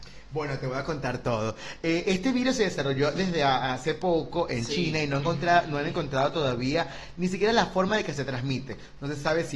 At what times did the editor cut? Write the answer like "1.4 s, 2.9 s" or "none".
none